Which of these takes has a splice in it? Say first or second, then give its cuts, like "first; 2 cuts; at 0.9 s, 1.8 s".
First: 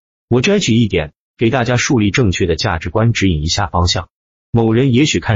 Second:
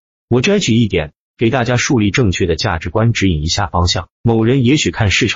second; 1 cut; at 4.1 s